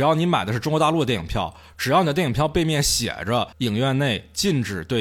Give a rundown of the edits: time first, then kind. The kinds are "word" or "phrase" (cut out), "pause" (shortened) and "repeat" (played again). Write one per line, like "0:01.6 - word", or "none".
0:03.5 - pause

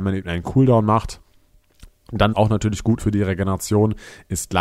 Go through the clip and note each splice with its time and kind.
0:02.3 - word
0:03.0 - word

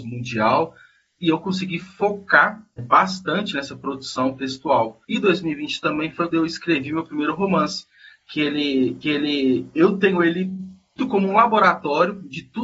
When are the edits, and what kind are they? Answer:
0:02.8 - word
0:05.0 - pause
0:06.3 - word
0:09.0 - repeat
0:11.0 - word

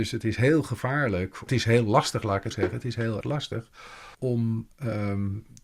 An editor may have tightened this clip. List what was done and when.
0:01.5 - phrase
0:02.5 - word
0:03.2 - word
0:04.1 - pause

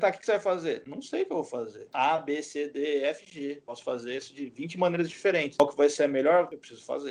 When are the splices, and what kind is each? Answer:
none

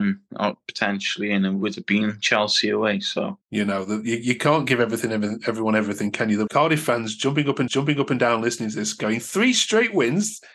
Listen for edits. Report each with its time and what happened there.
0:03.4 - pause
0:06.5 - word
0:07.7 - repeat

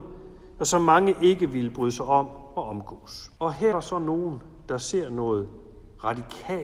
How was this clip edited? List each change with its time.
0:03.4 - pause
0:03.7 - word

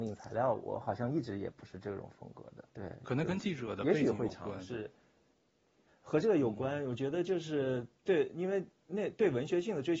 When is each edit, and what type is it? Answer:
0:02.7 - pause

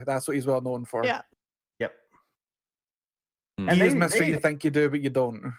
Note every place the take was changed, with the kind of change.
none

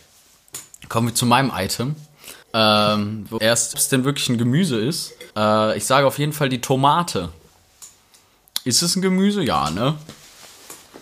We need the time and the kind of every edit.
0:02.4 - pause
0:03.4 - word
0:03.7 - phrase
0:05.3 - pause

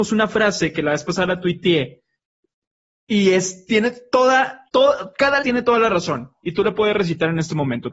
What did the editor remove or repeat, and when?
0:04.7 - pause
0:05.4 - word

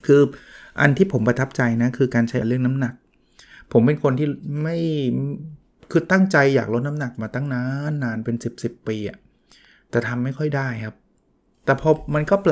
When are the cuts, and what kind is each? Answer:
0:02.4 - word

